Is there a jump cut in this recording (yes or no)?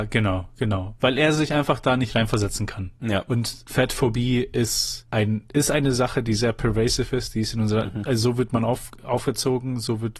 no